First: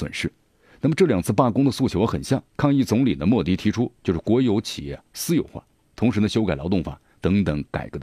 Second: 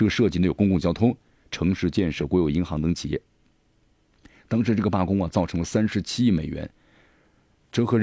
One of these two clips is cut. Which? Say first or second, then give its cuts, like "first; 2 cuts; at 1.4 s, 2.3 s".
first; 2 cuts; at 4.0 s, 5.8 s